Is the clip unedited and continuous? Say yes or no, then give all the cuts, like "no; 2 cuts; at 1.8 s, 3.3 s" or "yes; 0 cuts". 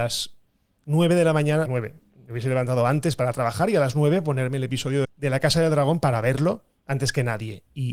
no; 2 cuts; at 1.7 s, 5.0 s